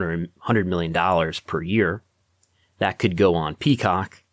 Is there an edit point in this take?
no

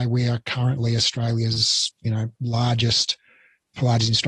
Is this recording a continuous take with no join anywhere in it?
no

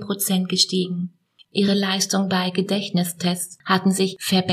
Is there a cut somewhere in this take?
no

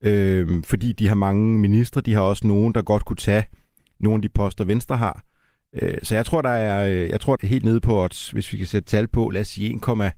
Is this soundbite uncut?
no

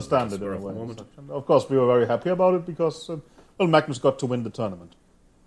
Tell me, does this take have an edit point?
no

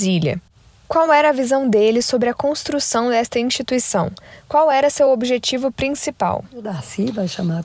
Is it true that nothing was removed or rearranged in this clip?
yes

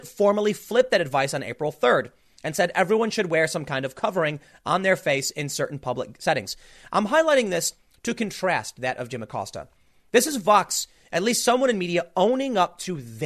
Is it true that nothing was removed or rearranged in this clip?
yes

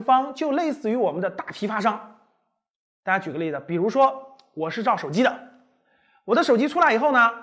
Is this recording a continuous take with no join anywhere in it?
yes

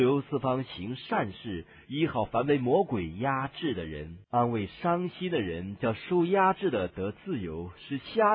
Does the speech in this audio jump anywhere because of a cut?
yes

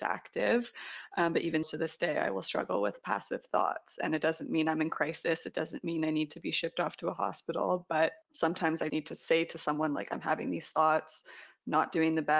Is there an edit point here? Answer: yes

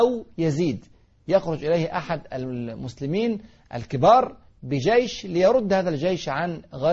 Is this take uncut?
yes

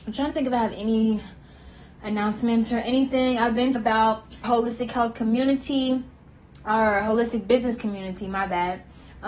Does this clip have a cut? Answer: yes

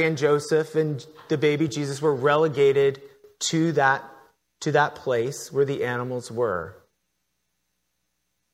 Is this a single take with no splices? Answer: yes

